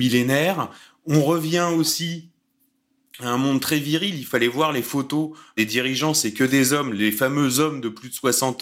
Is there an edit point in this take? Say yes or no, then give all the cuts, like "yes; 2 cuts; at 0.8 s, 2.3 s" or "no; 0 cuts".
no; 0 cuts